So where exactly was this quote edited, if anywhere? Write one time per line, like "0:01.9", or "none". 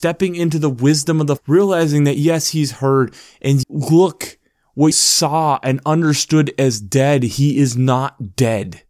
0:01.4
0:03.6
0:04.9

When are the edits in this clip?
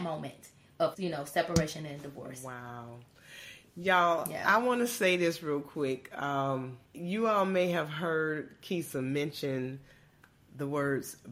0:00.9
0:06.8

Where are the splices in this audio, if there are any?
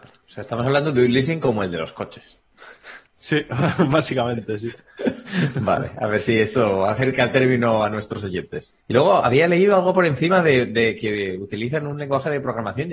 0:03.1
0:08.8

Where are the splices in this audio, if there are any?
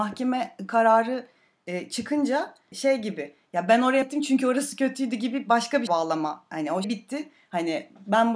0:02.7
0:04.0
0:05.9
0:06.8

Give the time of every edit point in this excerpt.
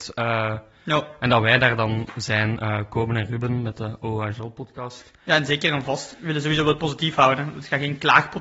none

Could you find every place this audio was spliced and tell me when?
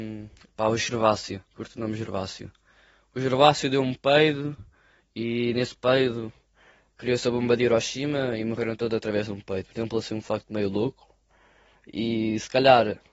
0:01.5

